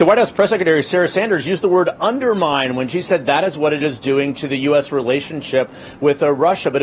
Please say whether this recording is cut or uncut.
uncut